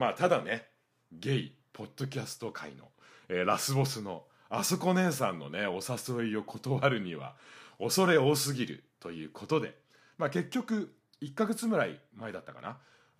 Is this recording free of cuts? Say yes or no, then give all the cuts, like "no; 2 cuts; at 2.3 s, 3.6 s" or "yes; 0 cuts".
yes; 0 cuts